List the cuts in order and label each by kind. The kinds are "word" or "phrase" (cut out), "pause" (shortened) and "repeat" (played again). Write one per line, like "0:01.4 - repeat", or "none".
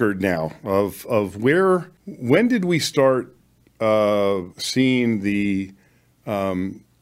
0:02.0 - pause
0:04.5 - pause